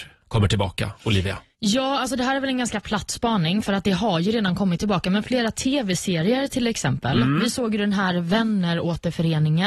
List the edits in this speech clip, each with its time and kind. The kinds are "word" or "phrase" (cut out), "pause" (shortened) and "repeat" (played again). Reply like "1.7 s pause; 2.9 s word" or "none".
none